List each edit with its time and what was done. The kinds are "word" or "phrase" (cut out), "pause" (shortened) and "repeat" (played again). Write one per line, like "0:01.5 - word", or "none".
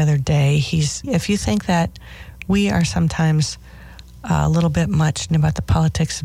0:01.0 - word
0:05.3 - word

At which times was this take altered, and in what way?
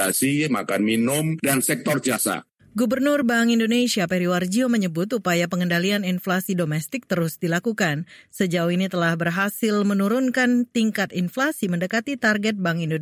none

